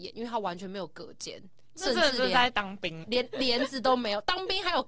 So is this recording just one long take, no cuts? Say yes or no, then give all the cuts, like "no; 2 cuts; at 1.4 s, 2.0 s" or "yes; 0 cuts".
no; 1 cut; at 3.0 s